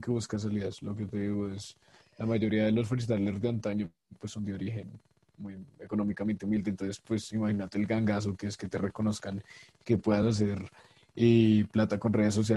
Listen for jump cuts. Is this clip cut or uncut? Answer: uncut